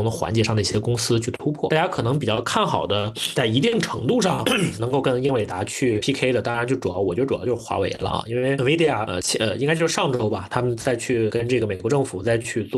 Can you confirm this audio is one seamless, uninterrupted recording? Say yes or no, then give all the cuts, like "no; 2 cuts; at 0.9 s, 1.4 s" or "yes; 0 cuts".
yes; 0 cuts